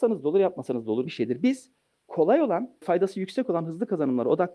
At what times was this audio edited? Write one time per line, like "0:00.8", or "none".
0:01.1
0:02.8